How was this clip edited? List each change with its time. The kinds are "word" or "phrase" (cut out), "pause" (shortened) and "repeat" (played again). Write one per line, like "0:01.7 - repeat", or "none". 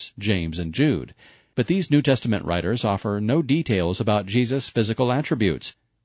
none